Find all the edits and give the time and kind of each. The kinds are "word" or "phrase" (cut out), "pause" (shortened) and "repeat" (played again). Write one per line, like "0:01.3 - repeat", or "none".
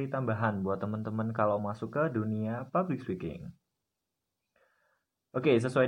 0:01.6 - word